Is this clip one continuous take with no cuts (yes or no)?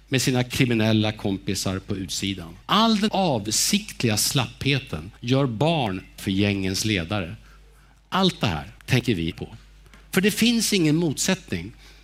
no